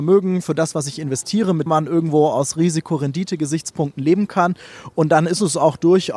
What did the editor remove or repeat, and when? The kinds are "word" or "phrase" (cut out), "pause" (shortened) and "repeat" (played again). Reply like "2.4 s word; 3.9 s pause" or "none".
1.7 s word

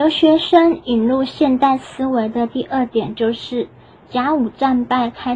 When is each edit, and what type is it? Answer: none

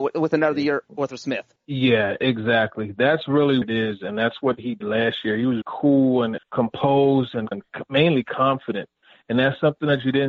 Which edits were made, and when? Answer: 1.1 s word; 3.6 s word; 4.8 s word; 5.6 s word; 6.4 s word; 7.5 s word

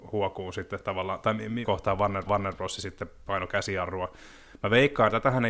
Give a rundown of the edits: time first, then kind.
1.6 s word; 2.3 s repeat

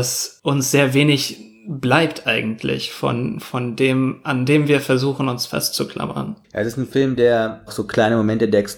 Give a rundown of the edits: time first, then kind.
6.4 s pause

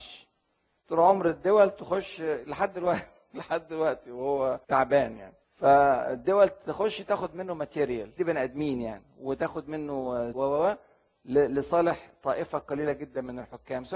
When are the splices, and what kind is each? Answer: 4.6 s pause; 5.4 s pause; 8.2 s word; 10.3 s phrase

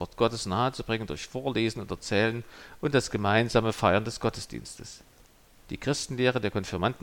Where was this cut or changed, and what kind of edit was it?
none

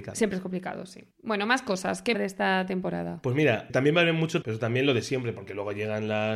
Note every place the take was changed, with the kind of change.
1.1 s pause; 2.1 s phrase; 3.7 s word; 4.4 s word

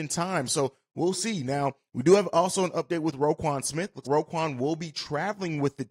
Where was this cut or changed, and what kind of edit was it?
4.0 s word

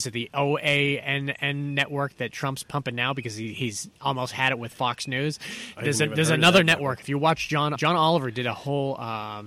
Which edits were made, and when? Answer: 7.8 s word

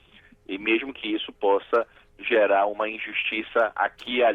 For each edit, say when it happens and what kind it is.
none

